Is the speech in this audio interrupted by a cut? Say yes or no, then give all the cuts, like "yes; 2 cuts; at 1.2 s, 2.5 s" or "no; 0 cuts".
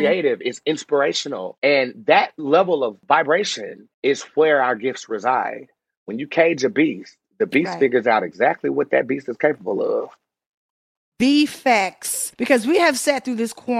yes; 1 cut; at 3.9 s